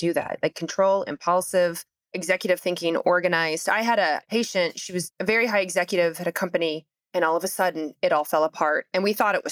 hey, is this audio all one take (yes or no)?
yes